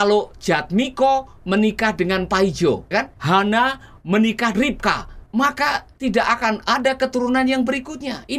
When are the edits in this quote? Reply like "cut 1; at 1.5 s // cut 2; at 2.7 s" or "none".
cut 1; at 2.9 s // cut 2; at 4.5 s // cut 3; at 6.0 s